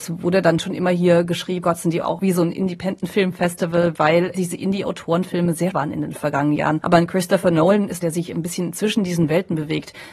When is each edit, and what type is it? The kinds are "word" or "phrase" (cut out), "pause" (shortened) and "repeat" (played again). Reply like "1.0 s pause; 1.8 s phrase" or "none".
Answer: 1.6 s word; 2.0 s phrase; 4.3 s word; 5.7 s word; 8.0 s phrase